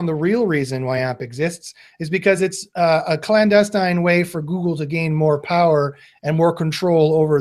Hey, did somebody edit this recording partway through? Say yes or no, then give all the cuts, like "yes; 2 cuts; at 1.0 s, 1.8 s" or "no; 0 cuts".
no; 0 cuts